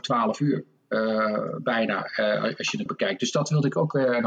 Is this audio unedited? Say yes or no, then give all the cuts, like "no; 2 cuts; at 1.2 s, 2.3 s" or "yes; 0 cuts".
no; 1 cut; at 2.9 s